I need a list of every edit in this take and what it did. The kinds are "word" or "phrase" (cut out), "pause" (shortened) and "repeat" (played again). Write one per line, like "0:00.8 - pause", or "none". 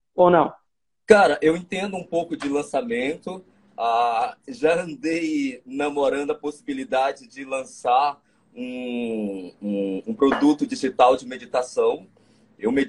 none